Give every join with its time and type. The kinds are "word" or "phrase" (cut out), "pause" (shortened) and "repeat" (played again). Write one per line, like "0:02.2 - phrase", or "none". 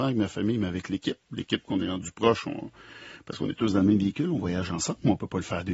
none